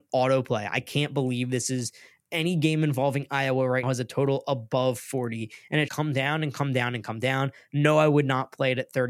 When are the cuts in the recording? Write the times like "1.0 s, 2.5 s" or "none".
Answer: 3.8 s, 5.9 s